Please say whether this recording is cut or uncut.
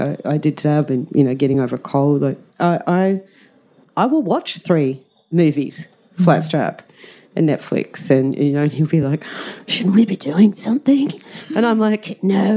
uncut